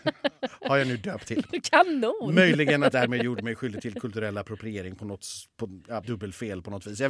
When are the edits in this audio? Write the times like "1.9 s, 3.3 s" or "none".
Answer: 1.3 s, 2.9 s, 6.0 s